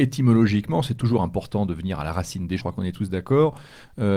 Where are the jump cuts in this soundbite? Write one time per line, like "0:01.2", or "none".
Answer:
0:02.6